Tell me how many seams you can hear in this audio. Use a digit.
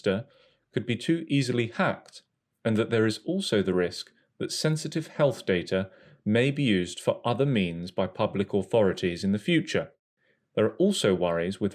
0